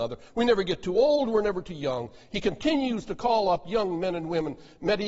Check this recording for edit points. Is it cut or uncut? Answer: uncut